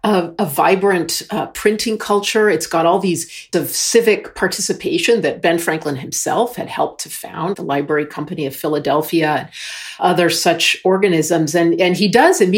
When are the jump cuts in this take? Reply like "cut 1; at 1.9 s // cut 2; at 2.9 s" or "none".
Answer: cut 1; at 3.5 s // cut 2; at 7.5 s // cut 3; at 10.0 s